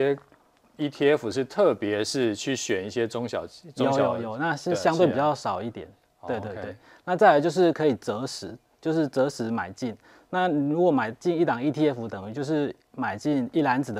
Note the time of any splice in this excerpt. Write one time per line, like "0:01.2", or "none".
none